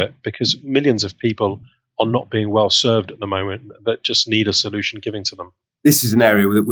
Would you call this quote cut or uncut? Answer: uncut